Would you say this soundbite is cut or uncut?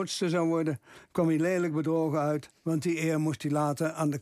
cut